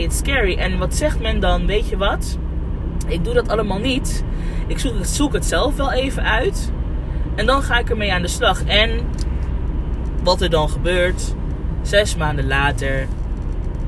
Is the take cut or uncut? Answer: uncut